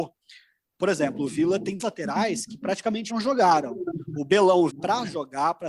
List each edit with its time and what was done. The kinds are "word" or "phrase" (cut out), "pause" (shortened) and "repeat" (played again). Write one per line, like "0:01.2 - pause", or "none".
0:01.8 - word
0:03.1 - word
0:04.7 - word